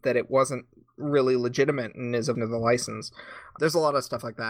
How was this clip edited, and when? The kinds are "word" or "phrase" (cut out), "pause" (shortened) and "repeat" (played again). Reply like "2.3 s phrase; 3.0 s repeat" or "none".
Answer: 2.3 s word; 3.6 s word